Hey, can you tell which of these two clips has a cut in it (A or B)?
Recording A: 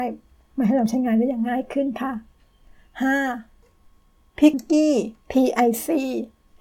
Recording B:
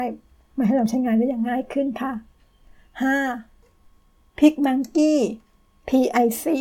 A